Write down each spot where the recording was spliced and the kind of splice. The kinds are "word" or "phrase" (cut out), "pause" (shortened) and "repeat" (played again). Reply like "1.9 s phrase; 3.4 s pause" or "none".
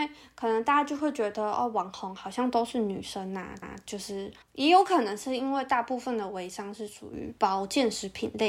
3.6 s repeat; 4.4 s pause; 7.4 s pause